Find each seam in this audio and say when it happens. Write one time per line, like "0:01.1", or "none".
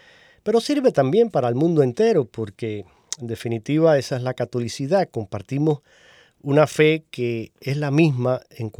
none